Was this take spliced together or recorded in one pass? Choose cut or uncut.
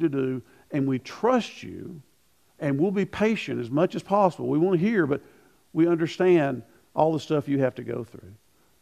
uncut